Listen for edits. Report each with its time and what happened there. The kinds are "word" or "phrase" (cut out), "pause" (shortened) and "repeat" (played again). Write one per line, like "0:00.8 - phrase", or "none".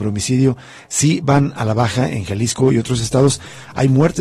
none

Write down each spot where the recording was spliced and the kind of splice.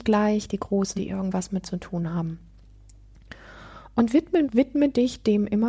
0:01.0 - word
0:01.6 - word
0:04.4 - word

